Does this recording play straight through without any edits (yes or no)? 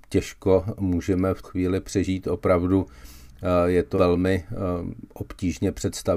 no